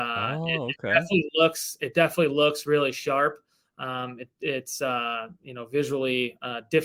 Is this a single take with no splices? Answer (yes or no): yes